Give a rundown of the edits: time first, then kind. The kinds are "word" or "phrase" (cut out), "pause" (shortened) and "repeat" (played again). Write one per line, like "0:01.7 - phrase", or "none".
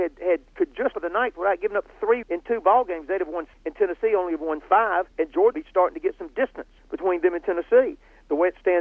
0:00.9 - phrase
0:02.2 - word
0:03.5 - word
0:05.1 - pause
0:05.5 - word
0:06.8 - pause